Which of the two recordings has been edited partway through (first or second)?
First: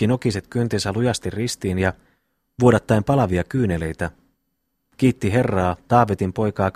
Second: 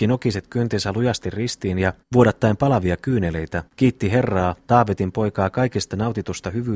second